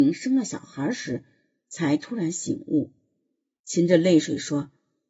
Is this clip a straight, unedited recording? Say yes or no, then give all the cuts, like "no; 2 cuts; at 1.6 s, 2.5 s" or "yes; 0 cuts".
yes; 0 cuts